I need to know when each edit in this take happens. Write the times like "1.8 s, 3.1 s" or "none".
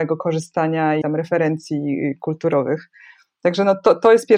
1.0 s